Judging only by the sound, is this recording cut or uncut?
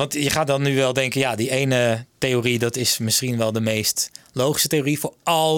uncut